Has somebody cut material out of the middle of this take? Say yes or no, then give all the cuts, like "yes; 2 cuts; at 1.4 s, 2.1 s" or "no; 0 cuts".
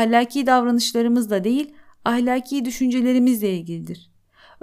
no; 0 cuts